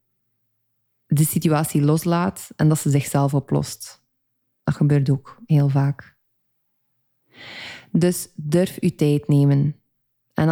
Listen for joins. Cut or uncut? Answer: uncut